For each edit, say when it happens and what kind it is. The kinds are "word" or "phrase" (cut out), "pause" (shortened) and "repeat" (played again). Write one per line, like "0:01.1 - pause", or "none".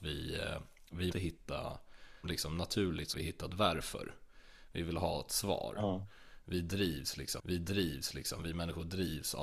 0:01.1 - word
0:02.2 - word
0:03.1 - word
0:07.4 - repeat